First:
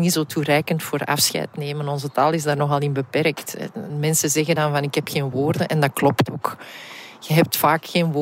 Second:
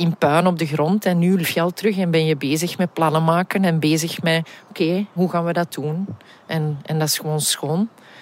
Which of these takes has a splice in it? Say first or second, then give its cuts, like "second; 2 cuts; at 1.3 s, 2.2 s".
second; 2 cuts; at 1.4 s, 5.2 s